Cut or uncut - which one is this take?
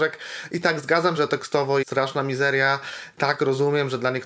cut